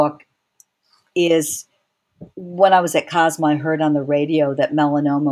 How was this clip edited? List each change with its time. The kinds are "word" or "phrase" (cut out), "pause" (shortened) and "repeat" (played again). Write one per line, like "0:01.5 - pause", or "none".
0:02.3 - pause